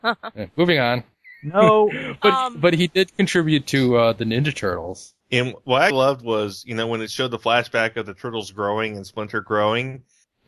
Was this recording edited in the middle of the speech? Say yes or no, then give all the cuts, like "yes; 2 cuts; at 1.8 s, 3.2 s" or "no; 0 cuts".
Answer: yes; 1 cut; at 5.9 s